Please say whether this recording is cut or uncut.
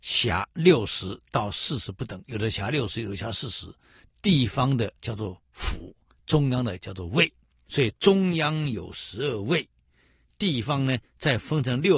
cut